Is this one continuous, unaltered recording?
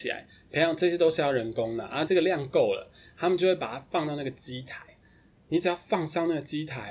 no; 1 cut; at 2.0 s

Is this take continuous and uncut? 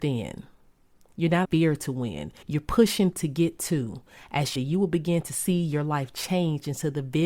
no; 4 cuts; at 1.4 s, 2.4 s, 3.1 s, 4.6 s

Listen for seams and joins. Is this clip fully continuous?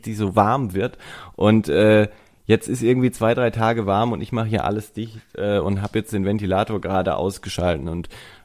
yes; 0 cuts

